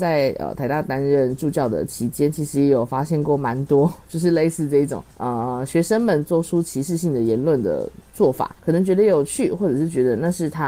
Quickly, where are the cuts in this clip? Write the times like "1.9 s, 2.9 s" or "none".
5.1 s, 8.6 s